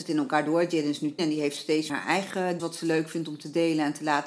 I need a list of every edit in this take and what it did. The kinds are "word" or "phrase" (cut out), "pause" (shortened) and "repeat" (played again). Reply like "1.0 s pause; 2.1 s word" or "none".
1.2 s word; 1.9 s word; 2.6 s word